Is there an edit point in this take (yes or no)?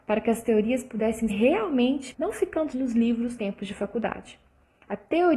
yes